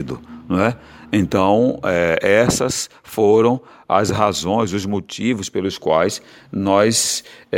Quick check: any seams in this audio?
no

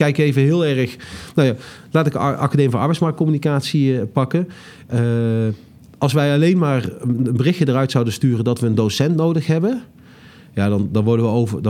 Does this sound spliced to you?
no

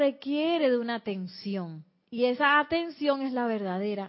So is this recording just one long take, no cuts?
yes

